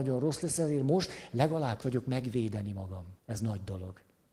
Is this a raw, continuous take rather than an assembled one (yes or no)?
no